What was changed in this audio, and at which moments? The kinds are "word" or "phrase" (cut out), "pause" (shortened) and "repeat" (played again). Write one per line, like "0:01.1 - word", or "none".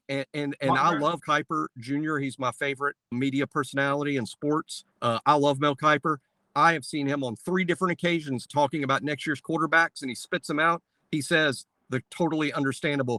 0:01.2 - word
0:03.1 - word
0:04.9 - pause
0:08.5 - word